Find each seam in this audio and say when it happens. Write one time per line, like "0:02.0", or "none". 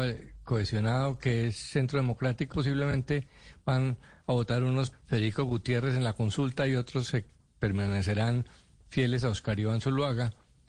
0:02.5
0:04.9

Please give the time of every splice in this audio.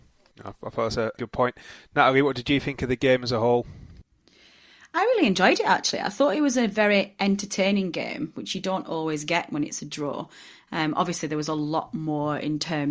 0:01.2

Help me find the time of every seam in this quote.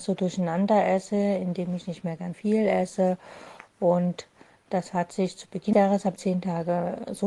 0:02.3
0:05.7
0:06.2

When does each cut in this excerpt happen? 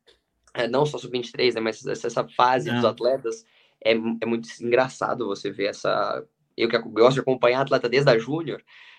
none

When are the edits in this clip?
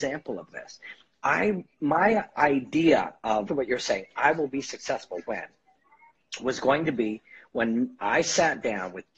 0:03.5

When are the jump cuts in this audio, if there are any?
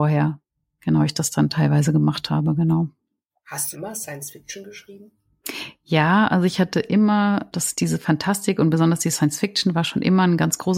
0:03.3
0:03.7
0:07.5

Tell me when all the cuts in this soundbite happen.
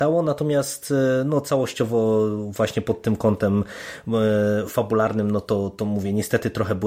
none

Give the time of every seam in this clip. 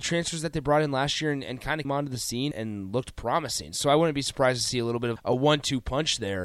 0:01.8
0:02.5
0:05.2

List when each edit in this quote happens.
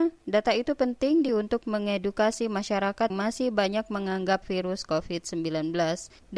0:01.3
0:03.1
0:04.4

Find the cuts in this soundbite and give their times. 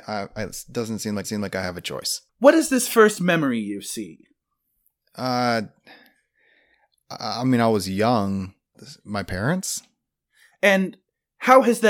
0:01.2
0:02.3
0:08.7

